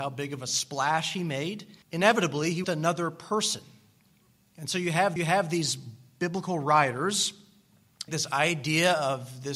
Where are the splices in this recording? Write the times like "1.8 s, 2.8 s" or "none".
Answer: 1.8 s, 2.6 s, 5.2 s, 8.1 s